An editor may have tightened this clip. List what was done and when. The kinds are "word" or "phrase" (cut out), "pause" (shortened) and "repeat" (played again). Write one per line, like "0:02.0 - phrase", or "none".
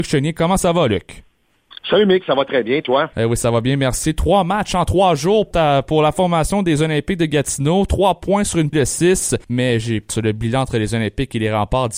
0:05.5 - word
0:08.7 - word
0:09.4 - pause
0:10.1 - phrase